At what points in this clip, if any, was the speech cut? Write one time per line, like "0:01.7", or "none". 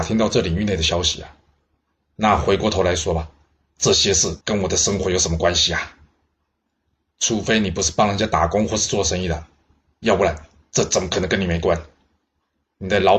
0:04.4